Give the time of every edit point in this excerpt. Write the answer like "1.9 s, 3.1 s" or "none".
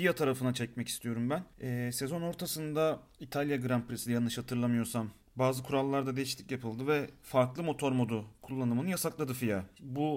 1.5 s